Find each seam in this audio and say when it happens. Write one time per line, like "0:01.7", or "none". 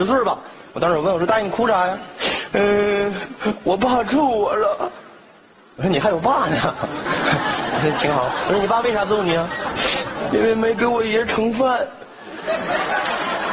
none